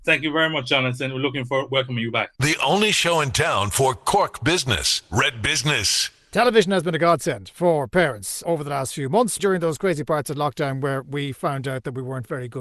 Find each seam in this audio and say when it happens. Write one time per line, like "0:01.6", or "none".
0:02.4
0:08.4
0:09.4